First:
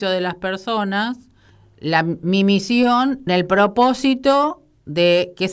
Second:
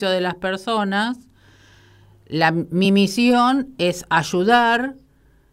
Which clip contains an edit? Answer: first; 2 cuts; at 1.5 s, 3.3 s

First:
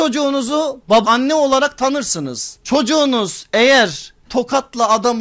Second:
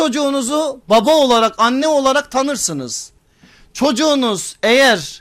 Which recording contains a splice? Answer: first; 3 cuts; at 1.0 s, 2.6 s, 4.3 s

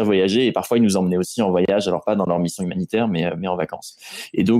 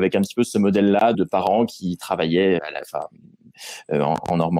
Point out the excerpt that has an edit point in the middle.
second; 2 cuts; at 1.1 s, 2.6 s

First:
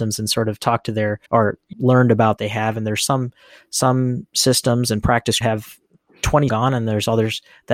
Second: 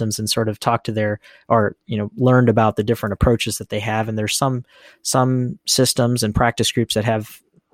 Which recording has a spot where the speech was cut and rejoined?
first; 5 cuts; at 1.3 s, 1.7 s, 2.4 s, 5.4 s, 6.5 s

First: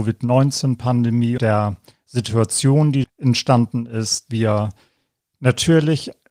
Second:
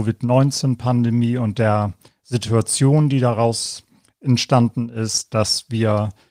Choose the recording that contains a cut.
first; 3 cuts; at 1.4 s, 3.0 s, 4.3 s

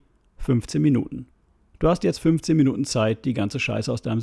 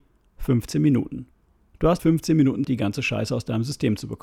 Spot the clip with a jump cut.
second; 2 cuts; at 2.0 s, 2.6 s

